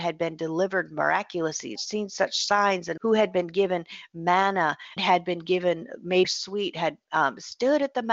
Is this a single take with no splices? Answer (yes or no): no